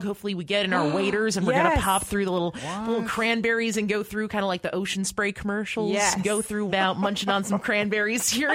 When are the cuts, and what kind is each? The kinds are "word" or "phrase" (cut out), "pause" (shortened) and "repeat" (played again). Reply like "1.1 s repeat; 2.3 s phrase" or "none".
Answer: 6.7 s word